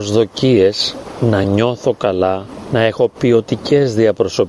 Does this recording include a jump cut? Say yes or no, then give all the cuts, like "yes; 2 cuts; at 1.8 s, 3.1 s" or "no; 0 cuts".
no; 0 cuts